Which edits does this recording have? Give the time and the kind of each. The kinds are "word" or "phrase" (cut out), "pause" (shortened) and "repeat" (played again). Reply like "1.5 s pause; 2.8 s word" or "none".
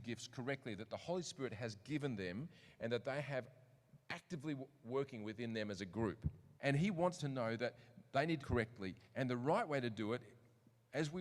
4.0 s pause; 6.6 s pause; 7.2 s word; 8.4 s phrase; 9.1 s pause